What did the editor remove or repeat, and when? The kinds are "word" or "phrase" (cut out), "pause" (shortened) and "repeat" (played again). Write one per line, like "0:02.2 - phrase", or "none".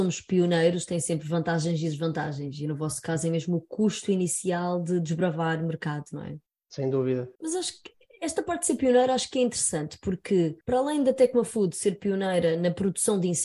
0:06.5 - pause
0:07.4 - pause
0:10.6 - pause